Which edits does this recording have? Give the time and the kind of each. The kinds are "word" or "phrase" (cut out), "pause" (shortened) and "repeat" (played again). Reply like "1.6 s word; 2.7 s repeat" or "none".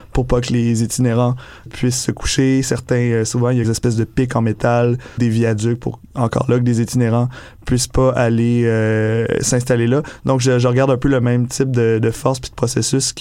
1.7 s word; 3.6 s phrase; 5.2 s word

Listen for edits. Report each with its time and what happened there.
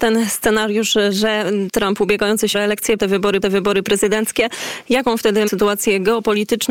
1.7 s word; 2.5 s word; 3.0 s word; 3.4 s repeat; 5.5 s word

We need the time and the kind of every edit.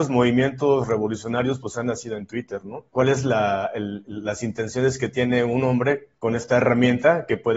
2.9 s pause; 6.2 s pause

